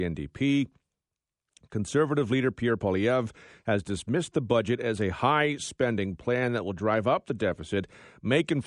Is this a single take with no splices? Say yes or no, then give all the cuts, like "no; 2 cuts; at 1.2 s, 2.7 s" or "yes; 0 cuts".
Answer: yes; 0 cuts